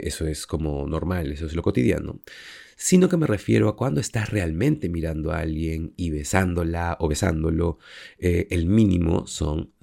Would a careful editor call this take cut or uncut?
uncut